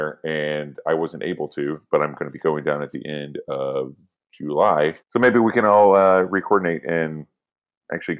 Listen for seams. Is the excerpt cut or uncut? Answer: cut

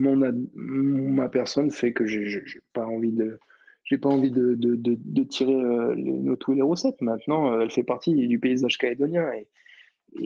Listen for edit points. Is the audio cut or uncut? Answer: uncut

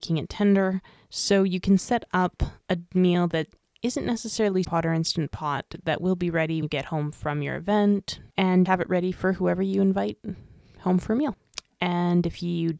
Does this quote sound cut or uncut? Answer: cut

